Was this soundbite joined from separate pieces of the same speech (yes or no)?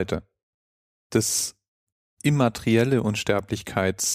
no